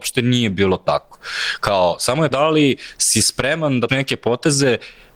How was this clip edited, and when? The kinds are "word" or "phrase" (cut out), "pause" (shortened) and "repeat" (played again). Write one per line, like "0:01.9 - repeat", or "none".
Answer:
0:02.3 - word
0:03.9 - word

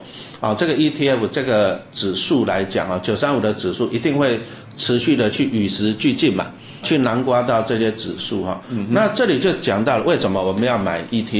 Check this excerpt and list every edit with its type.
0:06.8 - word

